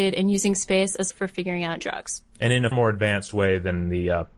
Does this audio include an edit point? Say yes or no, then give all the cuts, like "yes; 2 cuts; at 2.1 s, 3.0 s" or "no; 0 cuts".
yes; 4 cuts; at 1.1 s, 1.8 s, 2.3 s, 2.7 s